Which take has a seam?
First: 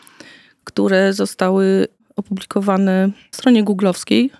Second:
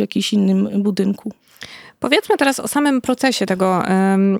first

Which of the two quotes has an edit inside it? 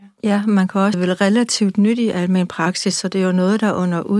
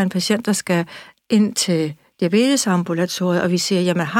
first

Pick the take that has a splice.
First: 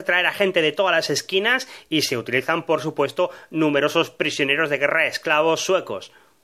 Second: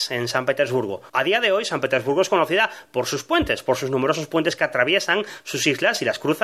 second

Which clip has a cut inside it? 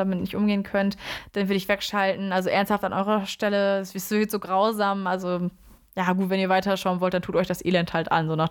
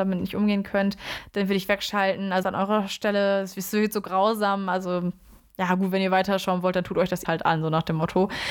second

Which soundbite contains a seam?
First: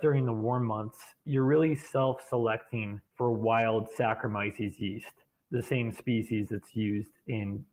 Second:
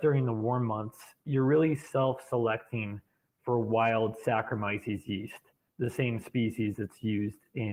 first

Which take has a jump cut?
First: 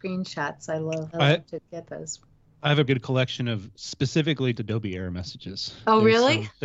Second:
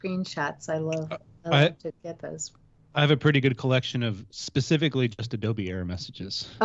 first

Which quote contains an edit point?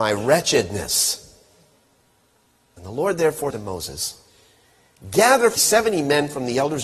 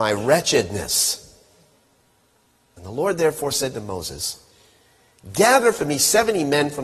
first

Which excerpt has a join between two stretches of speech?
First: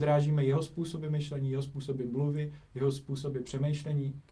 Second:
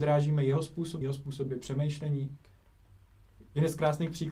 second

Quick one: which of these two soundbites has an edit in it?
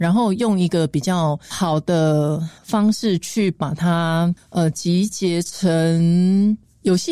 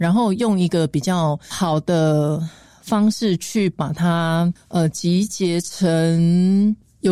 first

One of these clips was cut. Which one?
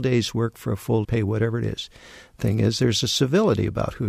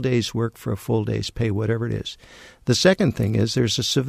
first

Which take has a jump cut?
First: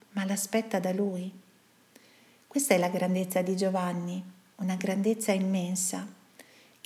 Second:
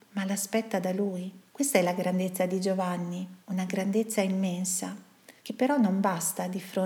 second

